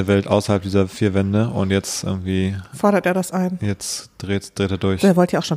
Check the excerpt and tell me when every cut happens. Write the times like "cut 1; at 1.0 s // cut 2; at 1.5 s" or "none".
none